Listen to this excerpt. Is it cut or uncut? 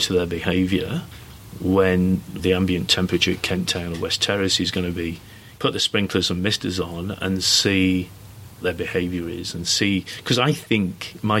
cut